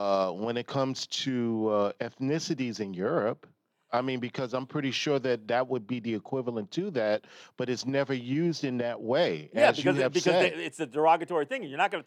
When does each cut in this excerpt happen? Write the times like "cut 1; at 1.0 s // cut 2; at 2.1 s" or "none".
none